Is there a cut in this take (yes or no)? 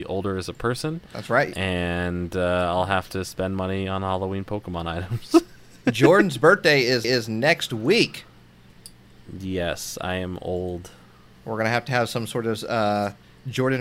yes